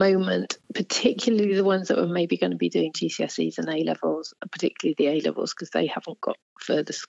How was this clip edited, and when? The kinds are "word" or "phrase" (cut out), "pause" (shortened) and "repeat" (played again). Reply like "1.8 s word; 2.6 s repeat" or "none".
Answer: none